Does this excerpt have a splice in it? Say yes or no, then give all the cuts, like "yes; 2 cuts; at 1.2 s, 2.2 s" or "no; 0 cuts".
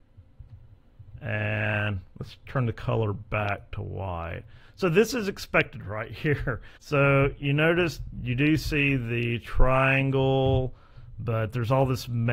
yes; 1 cut; at 6.8 s